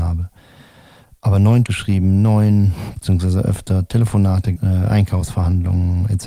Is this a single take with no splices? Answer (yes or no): no